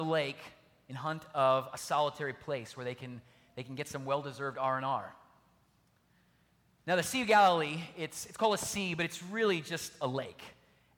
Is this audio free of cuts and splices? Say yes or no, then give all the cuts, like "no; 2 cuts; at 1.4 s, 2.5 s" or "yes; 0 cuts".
yes; 0 cuts